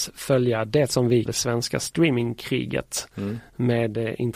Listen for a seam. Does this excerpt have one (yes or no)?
yes